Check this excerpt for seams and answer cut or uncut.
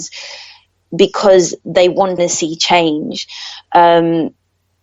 cut